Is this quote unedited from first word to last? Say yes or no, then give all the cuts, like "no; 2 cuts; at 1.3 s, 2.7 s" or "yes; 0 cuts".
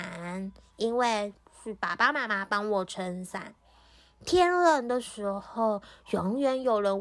yes; 0 cuts